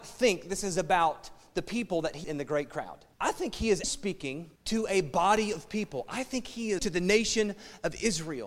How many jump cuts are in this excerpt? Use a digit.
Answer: 5